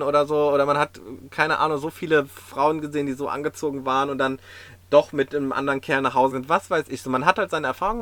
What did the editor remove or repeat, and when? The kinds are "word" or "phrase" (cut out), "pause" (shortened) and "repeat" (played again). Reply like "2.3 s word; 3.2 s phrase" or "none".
6.3 s word